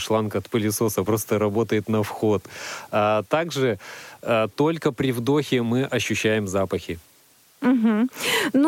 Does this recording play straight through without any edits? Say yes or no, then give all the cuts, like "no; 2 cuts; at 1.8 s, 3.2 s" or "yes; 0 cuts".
yes; 0 cuts